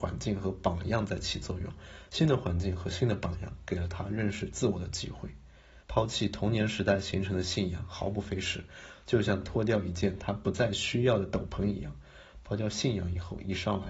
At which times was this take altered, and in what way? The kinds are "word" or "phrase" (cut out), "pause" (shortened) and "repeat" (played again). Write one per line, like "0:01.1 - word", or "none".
0:05.8 - pause